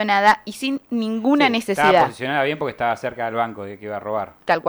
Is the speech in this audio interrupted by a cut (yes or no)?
no